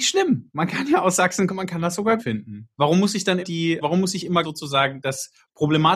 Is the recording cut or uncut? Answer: cut